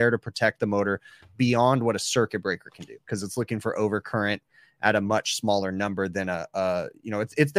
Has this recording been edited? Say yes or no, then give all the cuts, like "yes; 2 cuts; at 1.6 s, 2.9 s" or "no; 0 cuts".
no; 0 cuts